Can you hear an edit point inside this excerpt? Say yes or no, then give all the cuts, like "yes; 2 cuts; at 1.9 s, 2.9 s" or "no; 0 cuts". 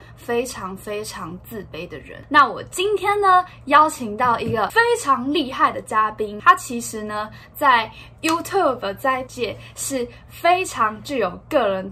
yes; 1 cut; at 9.3 s